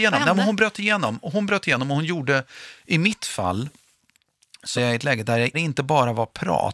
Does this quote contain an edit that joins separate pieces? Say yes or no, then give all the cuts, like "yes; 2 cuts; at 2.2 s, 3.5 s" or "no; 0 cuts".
yes; 2 cuts; at 4.8 s, 5.5 s